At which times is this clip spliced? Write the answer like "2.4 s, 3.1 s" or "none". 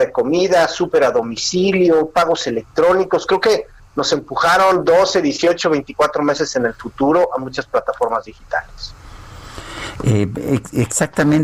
none